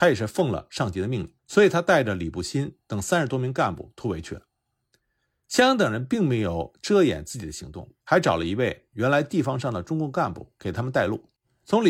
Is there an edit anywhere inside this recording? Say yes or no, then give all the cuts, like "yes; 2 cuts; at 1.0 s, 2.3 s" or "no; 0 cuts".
yes; 2 cuts; at 1.4 s, 8.0 s